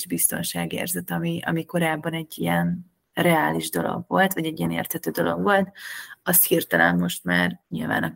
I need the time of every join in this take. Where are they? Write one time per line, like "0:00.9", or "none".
none